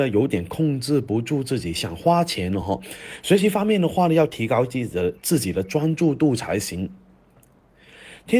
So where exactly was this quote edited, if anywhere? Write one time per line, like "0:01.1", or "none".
none